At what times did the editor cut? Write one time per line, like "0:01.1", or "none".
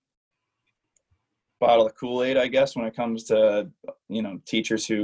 none